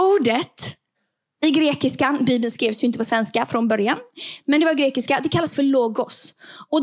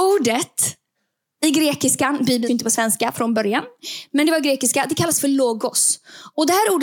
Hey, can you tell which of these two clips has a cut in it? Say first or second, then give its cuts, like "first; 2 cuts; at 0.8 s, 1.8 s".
second; 1 cut; at 2.5 s